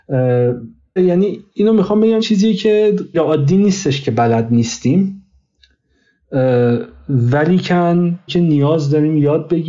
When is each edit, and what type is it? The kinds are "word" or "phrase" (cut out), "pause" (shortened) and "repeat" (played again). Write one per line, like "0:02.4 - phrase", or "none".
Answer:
0:01.0 - word
0:02.2 - word
0:03.1 - word
0:08.3 - word